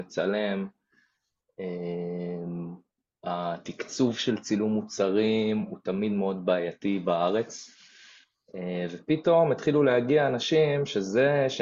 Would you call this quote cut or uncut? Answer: uncut